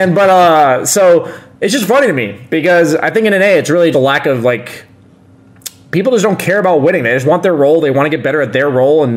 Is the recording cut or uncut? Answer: cut